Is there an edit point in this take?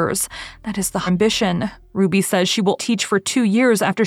yes; 2 cuts; at 1.1 s, 2.8 s

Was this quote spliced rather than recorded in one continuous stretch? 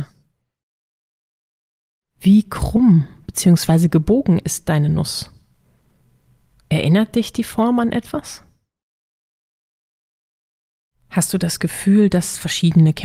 no; 0 cuts

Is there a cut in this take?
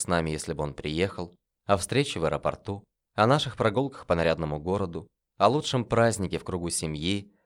no; 0 cuts

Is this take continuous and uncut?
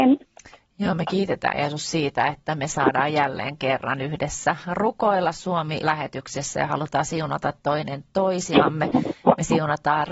no; 1 cut; at 5.8 s

